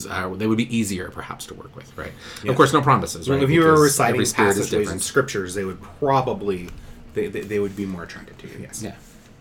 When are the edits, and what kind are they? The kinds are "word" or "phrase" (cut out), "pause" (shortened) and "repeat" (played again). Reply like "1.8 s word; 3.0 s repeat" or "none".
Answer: none